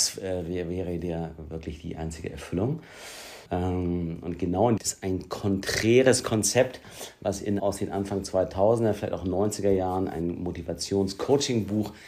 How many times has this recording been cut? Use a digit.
3